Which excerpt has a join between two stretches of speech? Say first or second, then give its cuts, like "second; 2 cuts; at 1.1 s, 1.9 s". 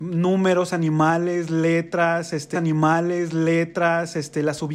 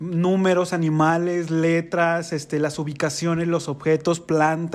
first; 1 cut; at 2.5 s